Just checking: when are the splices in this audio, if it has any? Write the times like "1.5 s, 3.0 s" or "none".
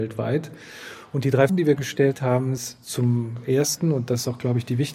1.5 s, 2.6 s

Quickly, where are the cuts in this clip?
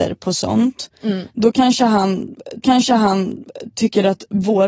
2.6 s

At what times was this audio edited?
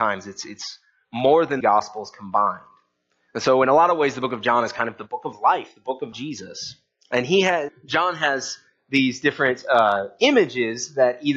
1.6 s, 6.1 s, 7.7 s

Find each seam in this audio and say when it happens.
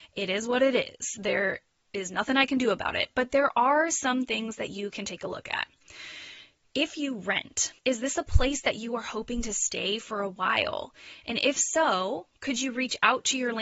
7.8 s

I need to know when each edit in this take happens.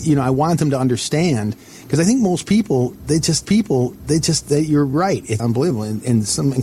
3.4 s, 5.4 s

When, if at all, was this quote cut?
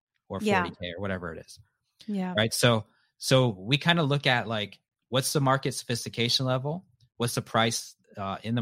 none

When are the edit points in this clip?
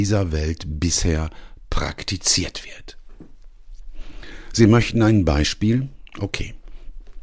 none

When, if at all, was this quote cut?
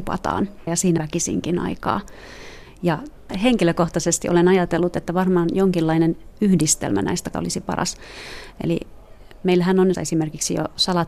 1.0 s, 7.3 s, 9.9 s

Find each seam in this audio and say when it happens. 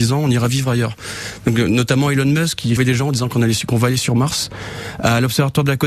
2.8 s

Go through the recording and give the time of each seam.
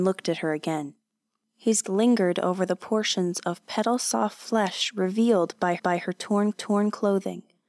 1.8 s, 5.8 s, 6.5 s

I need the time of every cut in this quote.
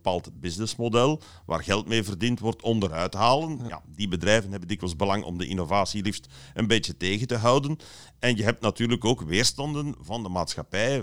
none

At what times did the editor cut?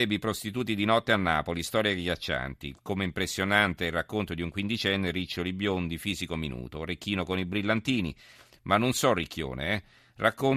none

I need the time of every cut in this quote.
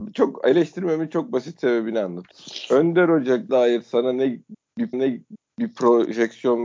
3.5 s, 4.9 s

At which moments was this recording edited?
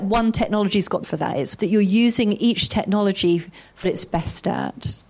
1.0 s, 1.6 s, 3.8 s

